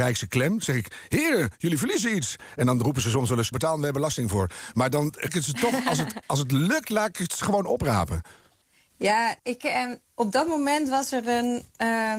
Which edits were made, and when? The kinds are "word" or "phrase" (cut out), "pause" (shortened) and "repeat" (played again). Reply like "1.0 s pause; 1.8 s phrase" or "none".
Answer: 3.5 s phrase; 5.3 s word; 6.2 s pause; 9.4 s pause; 10.0 s pause